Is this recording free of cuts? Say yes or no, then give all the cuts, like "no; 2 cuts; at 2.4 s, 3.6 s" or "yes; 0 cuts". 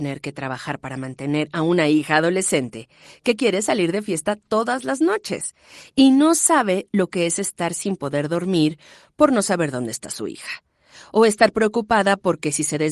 yes; 0 cuts